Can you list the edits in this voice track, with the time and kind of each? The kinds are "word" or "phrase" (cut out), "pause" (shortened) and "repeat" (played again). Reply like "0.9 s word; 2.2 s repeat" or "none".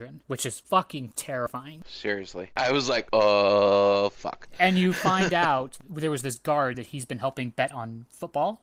none